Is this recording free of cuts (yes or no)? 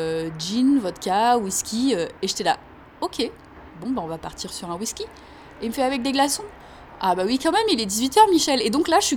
yes